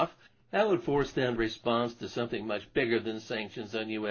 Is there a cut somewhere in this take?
yes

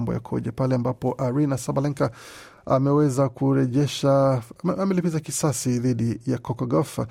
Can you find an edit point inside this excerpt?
no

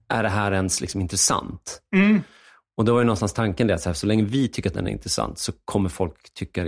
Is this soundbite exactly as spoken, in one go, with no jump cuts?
yes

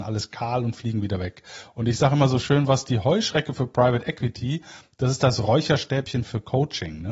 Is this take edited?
no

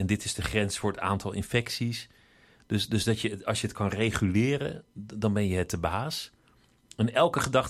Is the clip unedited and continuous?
yes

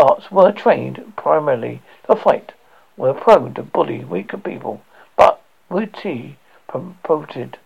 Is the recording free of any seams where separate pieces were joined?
yes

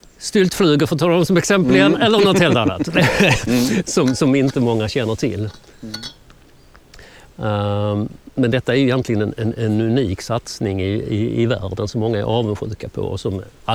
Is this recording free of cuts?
no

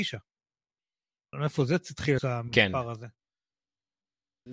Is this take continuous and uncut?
no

